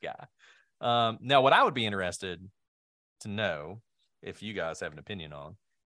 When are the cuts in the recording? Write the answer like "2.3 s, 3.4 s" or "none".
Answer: none